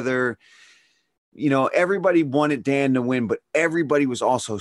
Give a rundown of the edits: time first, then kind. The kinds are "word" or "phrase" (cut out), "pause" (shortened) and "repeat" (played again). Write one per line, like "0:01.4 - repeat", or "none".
none